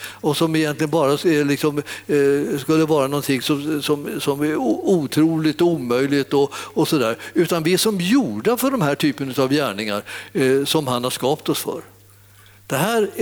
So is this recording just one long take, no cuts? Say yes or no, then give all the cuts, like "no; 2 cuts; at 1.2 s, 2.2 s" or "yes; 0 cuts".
yes; 0 cuts